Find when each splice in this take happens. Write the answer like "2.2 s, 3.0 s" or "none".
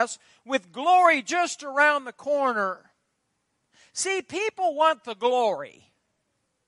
none